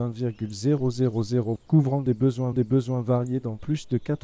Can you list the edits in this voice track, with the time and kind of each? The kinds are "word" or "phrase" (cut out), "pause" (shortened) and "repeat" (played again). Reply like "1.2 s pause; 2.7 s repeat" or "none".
1.6 s word; 2.5 s repeat